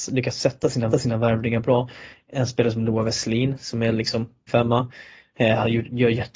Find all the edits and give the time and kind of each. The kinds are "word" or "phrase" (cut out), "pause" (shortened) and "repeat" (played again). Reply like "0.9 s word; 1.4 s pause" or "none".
0.9 s repeat; 4.5 s word